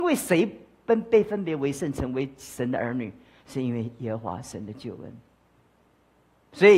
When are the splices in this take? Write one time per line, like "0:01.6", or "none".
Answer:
none

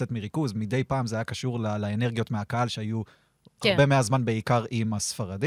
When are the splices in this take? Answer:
none

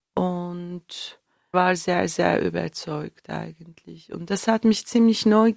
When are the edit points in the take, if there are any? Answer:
0:01.5

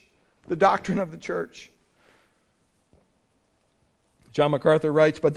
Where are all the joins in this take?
none

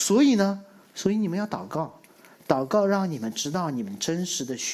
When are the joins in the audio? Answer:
none

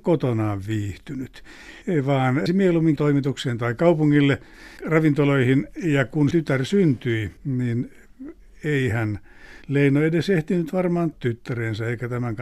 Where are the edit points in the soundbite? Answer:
0:01.8
0:02.5
0:03.0
0:04.8
0:06.3
0:07.4
0:09.6
0:11.1

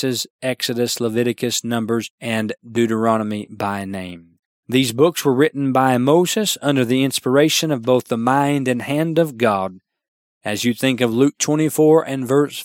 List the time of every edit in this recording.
0:02.1

